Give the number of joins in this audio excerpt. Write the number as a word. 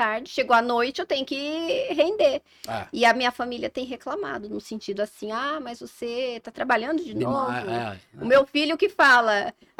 zero